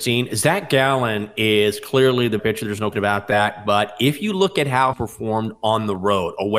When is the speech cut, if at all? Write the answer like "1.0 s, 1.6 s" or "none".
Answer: 2.4 s, 2.9 s, 4.9 s